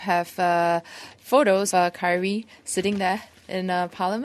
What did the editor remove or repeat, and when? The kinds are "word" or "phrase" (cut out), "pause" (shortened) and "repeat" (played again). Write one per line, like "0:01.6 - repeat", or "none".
0:01.7 - word